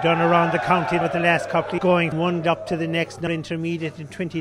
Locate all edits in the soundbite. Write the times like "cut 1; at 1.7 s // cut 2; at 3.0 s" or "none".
cut 1; at 1.0 s // cut 2; at 1.8 s // cut 3; at 2.1 s // cut 4; at 2.4 s // cut 5; at 3.3 s

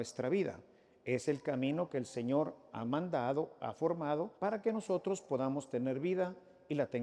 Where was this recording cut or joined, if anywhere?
cut 1; at 4.4 s

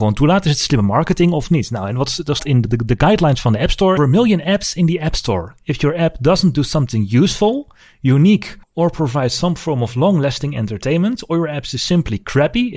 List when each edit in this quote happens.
cut 1; at 2.4 s // cut 2; at 4.0 s // cut 3; at 8.6 s

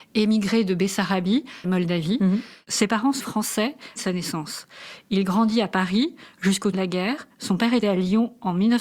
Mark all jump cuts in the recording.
cut 1; at 1.6 s // cut 2; at 3.2 s // cut 3; at 4.0 s // cut 4; at 6.7 s // cut 5; at 7.8 s

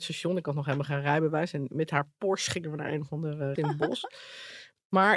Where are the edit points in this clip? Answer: cut 1; at 3.6 s

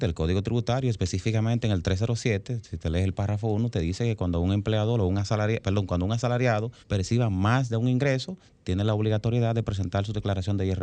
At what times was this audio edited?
cut 1; at 6.8 s

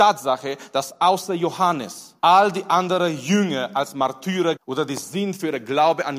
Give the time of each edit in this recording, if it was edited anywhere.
cut 1; at 2.2 s // cut 2; at 4.6 s

